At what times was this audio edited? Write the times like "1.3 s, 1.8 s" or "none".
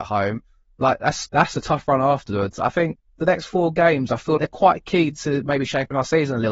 1.3 s, 4.4 s

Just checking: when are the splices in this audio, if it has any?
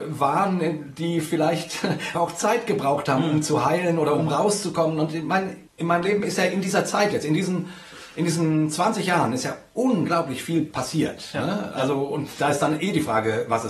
2.1 s, 5.7 s

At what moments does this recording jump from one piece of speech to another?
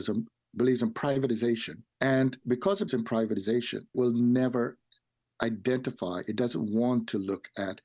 1.9 s, 2.9 s, 3.9 s

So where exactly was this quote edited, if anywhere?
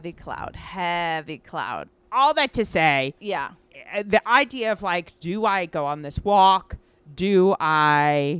3.2 s

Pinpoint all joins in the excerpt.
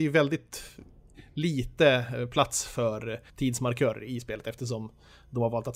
3.3 s

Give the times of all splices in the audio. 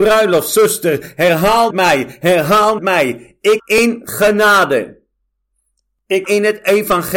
1.7 s, 2.8 s, 3.6 s, 6.2 s

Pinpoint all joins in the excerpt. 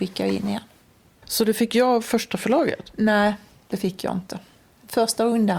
none

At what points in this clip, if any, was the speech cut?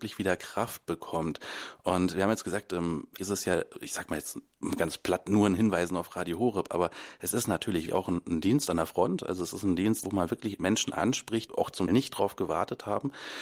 3.2 s, 7.9 s, 10.0 s, 11.5 s, 11.9 s

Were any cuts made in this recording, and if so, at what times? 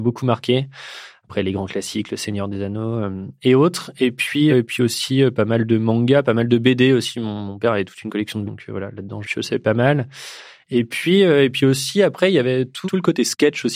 4.5 s, 8.4 s, 9.2 s, 12.9 s

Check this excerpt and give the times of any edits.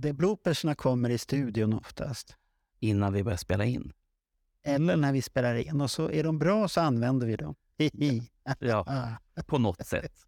none

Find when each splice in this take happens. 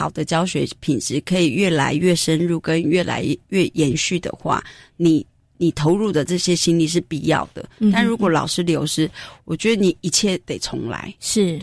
5.4 s

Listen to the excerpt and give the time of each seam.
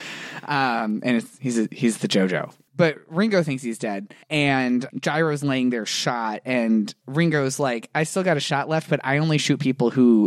4.2 s

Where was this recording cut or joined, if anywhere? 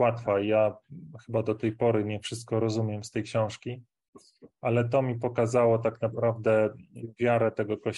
none

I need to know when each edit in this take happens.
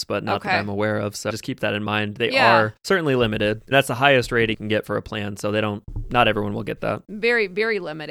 1.3 s, 3.7 s, 4.5 s

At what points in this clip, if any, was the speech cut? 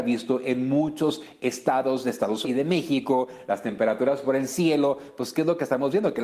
2.4 s

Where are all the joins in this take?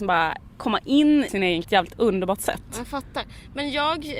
1.3 s, 1.6 s

